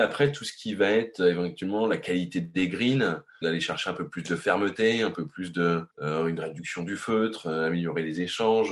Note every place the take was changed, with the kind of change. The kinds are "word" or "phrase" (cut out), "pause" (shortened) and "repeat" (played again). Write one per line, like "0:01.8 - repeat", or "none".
0:03.4 - word
0:05.9 - pause